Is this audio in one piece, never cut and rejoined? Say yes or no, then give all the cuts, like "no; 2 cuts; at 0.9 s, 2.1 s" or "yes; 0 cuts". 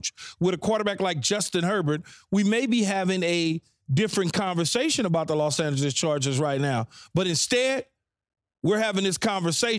yes; 0 cuts